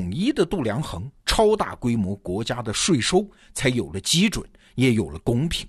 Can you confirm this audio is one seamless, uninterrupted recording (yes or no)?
yes